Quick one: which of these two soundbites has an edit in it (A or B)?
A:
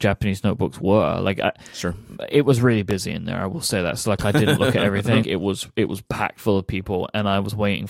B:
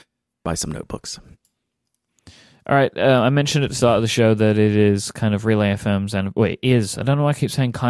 A